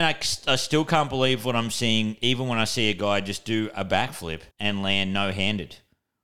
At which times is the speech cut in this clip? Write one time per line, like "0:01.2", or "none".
0:04.5